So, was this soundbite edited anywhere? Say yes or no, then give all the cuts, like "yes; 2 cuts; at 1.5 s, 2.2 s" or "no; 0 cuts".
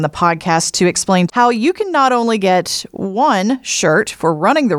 yes; 1 cut; at 1.3 s